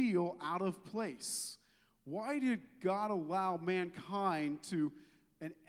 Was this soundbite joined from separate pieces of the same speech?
no; 0 cuts

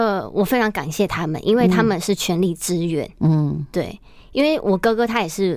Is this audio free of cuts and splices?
yes; 0 cuts

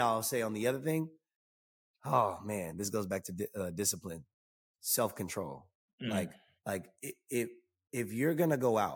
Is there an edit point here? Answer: no; 0 cuts

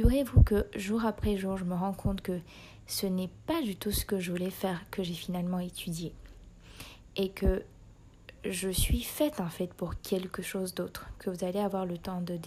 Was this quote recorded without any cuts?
yes; 0 cuts

